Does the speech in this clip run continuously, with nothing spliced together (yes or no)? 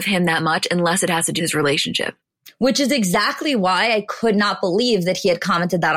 no